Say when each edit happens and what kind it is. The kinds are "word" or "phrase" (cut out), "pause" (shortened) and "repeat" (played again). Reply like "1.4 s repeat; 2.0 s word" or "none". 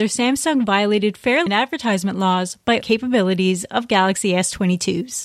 1.5 s word; 2.8 s word